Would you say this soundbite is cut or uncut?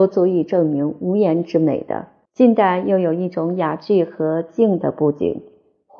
cut